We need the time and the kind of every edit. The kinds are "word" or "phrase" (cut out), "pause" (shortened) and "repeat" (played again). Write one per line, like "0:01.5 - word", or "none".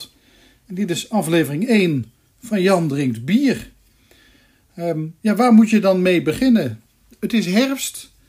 none